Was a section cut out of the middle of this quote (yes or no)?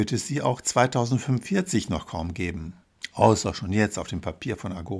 no